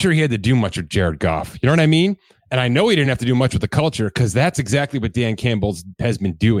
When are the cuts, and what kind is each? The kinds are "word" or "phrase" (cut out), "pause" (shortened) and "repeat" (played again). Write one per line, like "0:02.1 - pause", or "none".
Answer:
none